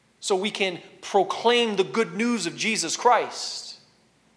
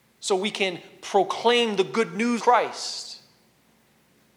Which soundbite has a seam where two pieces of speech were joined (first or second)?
second